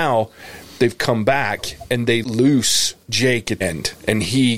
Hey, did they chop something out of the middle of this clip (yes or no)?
yes